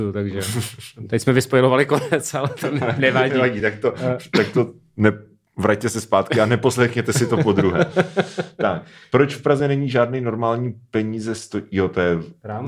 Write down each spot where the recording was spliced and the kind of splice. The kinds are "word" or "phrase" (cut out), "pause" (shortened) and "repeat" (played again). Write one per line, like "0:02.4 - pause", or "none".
none